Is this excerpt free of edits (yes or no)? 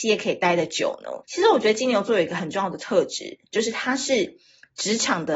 no